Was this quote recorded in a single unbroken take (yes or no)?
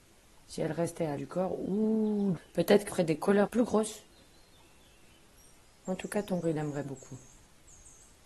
no